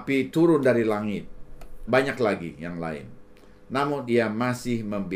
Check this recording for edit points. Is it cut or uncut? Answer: cut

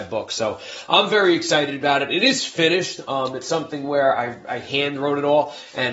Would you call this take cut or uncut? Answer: uncut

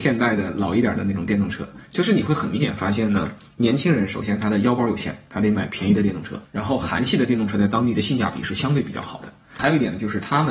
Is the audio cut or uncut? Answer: cut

